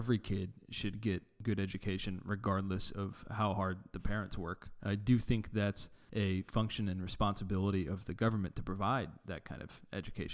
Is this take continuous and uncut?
yes; 0 cuts

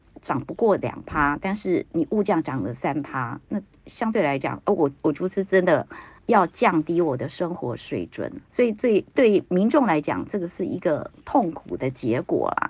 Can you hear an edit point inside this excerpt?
yes; 3 cuts; at 5.0 s, 6.2 s, 8.4 s

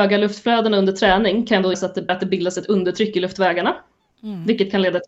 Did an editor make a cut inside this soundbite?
yes; 2 cuts; at 1.7 s, 2.1 s

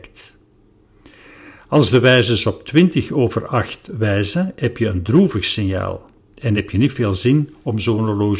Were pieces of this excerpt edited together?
no; 0 cuts

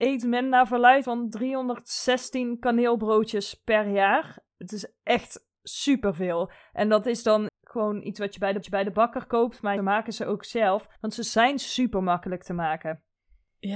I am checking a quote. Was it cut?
yes; 7 cuts; at 1.0 s, 4.5 s, 5.6 s, 7.5 s, 8.6 s, 9.8 s, 11.0 s

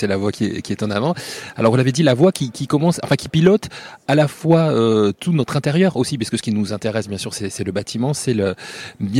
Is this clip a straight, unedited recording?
yes; 0 cuts

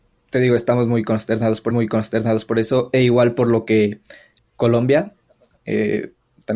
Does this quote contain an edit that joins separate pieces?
yes; 2 cuts; at 1.7 s, 4.4 s

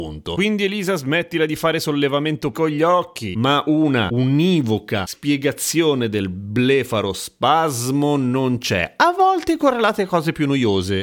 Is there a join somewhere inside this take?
yes; 1 cut; at 2.5 s

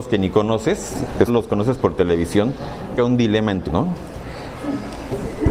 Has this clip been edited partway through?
yes; 3 cuts; at 1.3 s, 3.0 s, 3.7 s

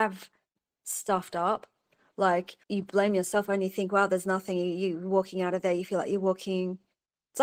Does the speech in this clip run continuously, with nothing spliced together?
no; 1 cut; at 2.6 s

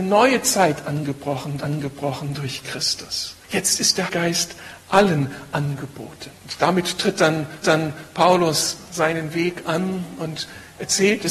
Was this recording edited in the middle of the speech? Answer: yes; 5 cuts; at 1.6 s, 3.4 s, 4.1 s, 6.4 s, 7.6 s

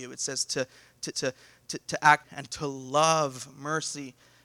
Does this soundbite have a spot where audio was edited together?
yes; 2 cuts; at 1.1 s, 2.2 s

